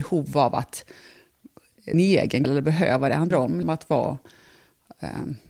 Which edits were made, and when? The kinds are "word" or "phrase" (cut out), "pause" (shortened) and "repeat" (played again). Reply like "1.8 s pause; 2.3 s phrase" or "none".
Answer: 1.9 s word; 2.4 s word; 3.3 s word; 3.6 s word

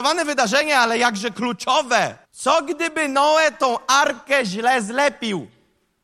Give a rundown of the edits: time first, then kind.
2.2 s pause

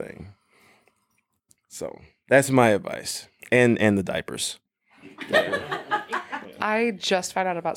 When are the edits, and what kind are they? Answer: none

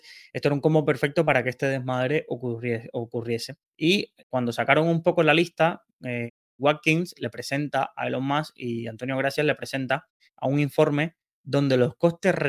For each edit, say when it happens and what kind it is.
3.7 s pause

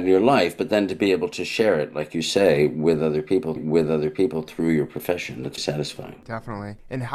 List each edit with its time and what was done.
3.6 s repeat; 5.6 s word

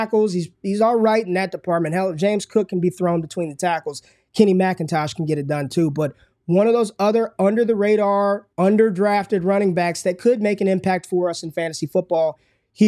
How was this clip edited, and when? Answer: 8.5 s pause

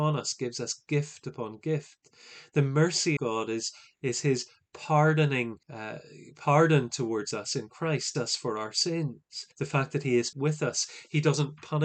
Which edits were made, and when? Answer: 3.2 s word; 5.6 s pause; 8.1 s phrase; 9.5 s pause; 10.3 s word

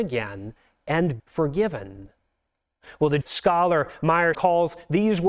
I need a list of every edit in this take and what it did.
1.2 s word; 3.2 s word; 4.3 s word

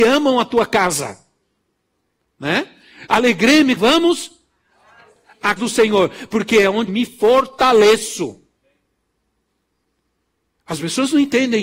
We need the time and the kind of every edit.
3.8 s phrase; 5.6 s word; 6.9 s word

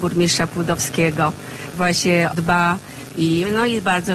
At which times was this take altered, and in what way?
1.7 s word; 2.3 s phrase

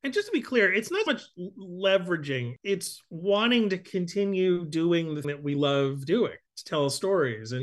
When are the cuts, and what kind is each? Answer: 1.1 s word; 5.2 s word

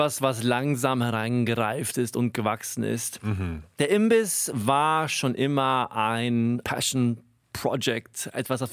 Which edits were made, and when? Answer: none

